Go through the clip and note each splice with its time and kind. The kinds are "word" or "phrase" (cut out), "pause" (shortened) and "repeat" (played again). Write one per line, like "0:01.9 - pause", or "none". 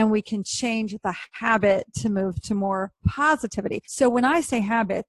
0:03.8 - pause